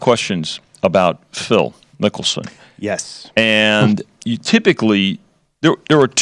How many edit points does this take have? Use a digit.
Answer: 0